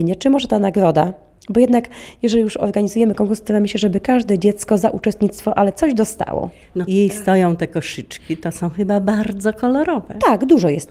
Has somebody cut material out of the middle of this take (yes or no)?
yes